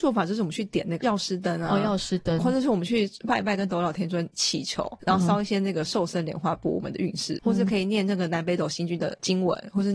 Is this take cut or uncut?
cut